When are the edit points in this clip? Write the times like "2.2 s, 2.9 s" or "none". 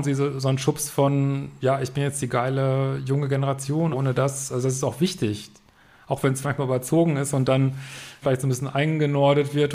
3.9 s, 6.4 s, 8.2 s